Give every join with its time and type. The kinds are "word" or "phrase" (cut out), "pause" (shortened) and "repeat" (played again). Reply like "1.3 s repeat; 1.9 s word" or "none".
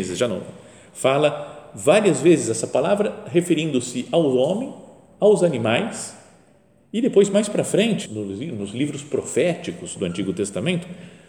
8.1 s word

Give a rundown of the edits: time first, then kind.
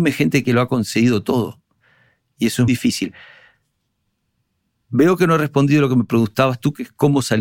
2.7 s word

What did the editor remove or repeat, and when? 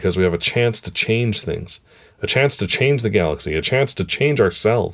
none

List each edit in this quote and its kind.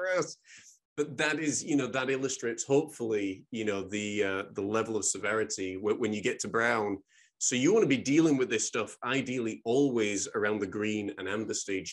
none

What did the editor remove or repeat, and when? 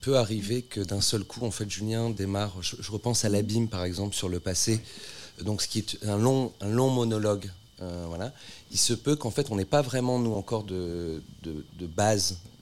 none

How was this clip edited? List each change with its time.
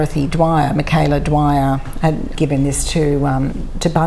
2.3 s word

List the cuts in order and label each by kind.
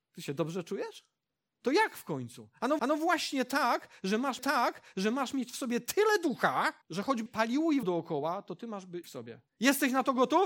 1.3 s pause; 2.8 s repeat; 4.4 s repeat; 6.8 s pause; 7.3 s word; 7.8 s word; 9.0 s phrase; 9.5 s pause

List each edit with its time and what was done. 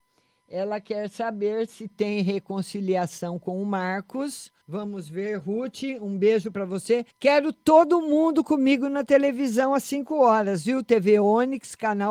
4.6 s pause; 7.1 s pause

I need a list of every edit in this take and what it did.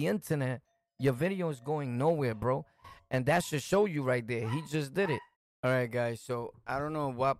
5.3 s pause

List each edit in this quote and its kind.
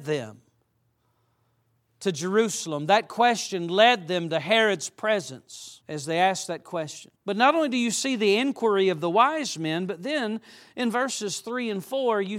5.8 s pause; 7.2 s pause

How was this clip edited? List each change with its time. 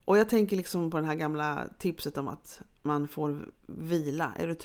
3.6 s pause

